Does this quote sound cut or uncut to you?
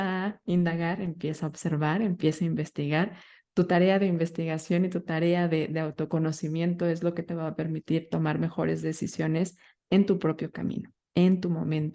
uncut